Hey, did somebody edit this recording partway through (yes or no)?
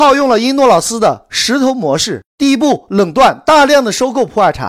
yes